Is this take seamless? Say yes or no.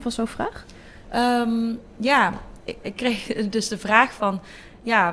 no